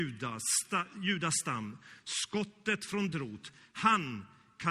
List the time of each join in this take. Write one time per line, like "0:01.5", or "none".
0:03.1